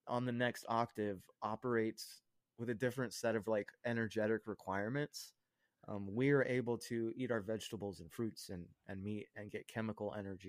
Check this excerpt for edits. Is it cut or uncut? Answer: uncut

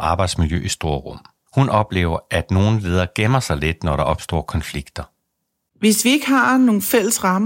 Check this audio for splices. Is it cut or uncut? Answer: uncut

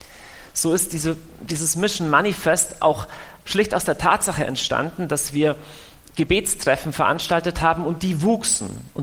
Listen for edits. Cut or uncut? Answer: uncut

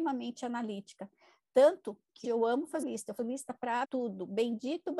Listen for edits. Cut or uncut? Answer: cut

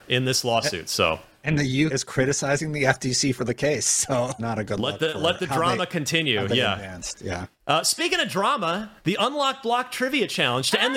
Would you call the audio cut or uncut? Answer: cut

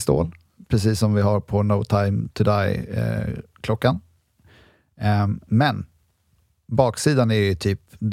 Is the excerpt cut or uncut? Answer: uncut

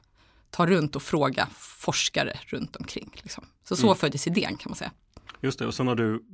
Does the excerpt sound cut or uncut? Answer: uncut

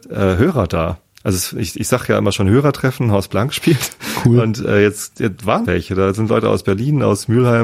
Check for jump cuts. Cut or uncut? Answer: cut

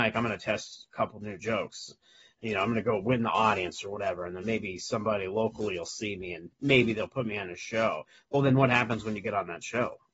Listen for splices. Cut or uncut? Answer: uncut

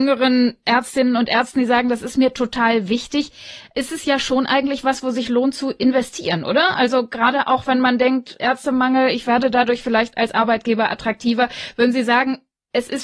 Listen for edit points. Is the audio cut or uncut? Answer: uncut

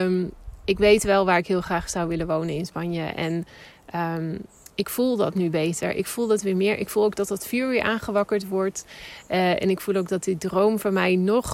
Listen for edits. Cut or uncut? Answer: uncut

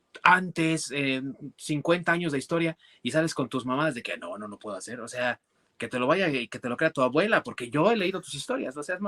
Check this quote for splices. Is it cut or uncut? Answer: uncut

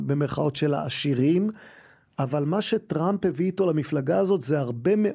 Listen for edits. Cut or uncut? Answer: uncut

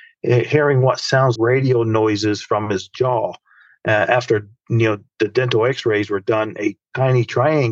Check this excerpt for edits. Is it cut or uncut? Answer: cut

